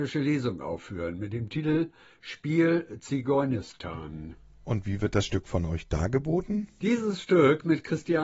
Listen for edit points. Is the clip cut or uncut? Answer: uncut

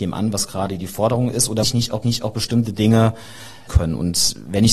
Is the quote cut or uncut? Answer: cut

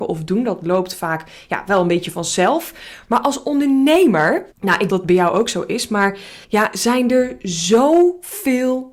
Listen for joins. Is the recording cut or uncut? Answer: cut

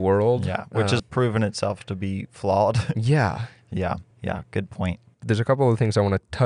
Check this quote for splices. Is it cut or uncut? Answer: cut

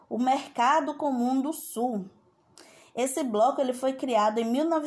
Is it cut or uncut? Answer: uncut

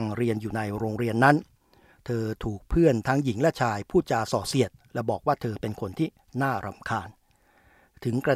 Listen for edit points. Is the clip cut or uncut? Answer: uncut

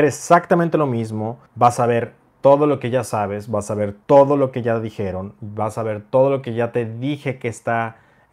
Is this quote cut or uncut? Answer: cut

